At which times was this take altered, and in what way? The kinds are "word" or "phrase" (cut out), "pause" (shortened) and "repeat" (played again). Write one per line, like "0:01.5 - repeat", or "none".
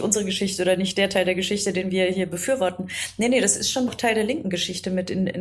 0:03.9 - word